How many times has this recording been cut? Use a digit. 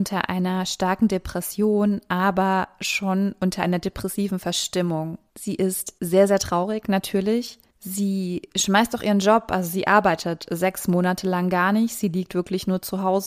0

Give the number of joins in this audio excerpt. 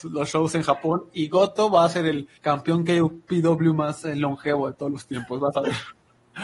1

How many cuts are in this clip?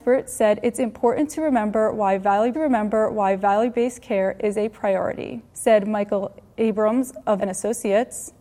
3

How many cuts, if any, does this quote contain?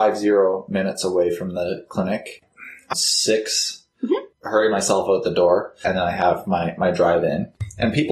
2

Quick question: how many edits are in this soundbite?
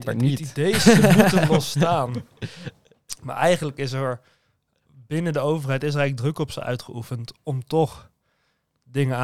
0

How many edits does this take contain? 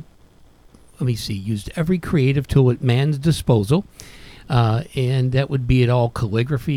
0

